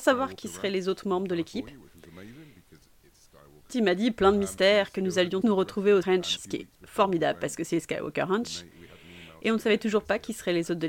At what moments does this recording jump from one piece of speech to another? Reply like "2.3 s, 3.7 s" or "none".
3.7 s, 5.4 s, 6.0 s, 6.4 s